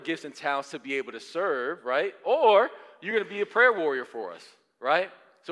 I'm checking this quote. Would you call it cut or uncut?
uncut